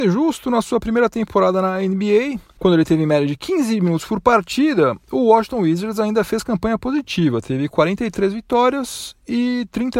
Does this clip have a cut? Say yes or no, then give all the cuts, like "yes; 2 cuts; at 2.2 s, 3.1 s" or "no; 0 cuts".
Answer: no; 0 cuts